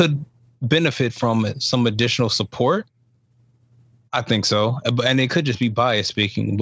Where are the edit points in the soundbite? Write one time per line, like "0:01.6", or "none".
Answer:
none

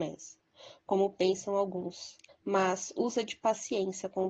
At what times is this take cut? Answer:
0:02.3

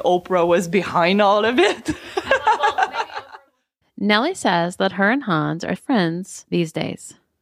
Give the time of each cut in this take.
0:05.8

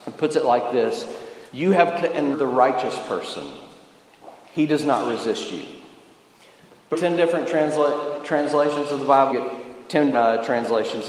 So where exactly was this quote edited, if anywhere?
0:01.5
0:02.0
0:02.3
0:06.9
0:09.3
0:10.1

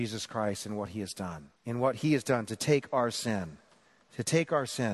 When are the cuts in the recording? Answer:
0:01.6

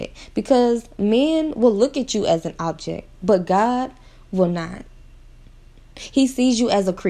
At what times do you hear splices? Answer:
none

